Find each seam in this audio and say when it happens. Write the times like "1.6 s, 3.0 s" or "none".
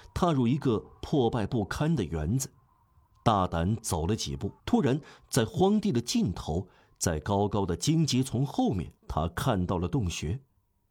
4.6 s, 9.0 s

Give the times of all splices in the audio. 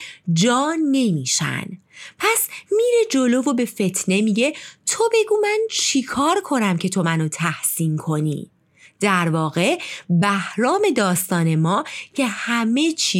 none

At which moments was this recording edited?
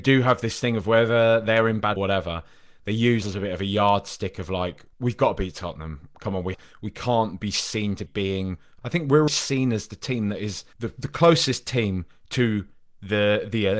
2.0 s, 3.2 s, 4.9 s, 6.5 s, 8.1 s, 8.8 s, 9.3 s, 10.7 s

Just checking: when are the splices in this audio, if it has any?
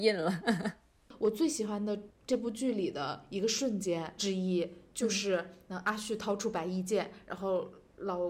4.2 s

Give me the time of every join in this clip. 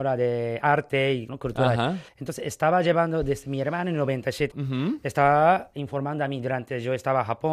1.3 s, 2.1 s, 4.5 s

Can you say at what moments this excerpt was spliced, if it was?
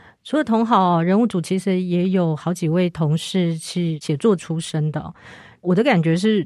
none

